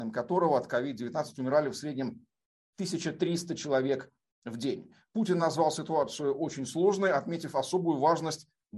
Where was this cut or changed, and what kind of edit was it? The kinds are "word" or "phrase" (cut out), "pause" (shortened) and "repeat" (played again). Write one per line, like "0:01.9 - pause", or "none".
none